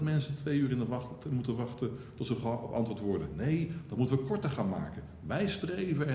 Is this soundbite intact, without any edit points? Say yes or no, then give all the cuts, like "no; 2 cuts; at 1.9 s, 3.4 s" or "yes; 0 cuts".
yes; 0 cuts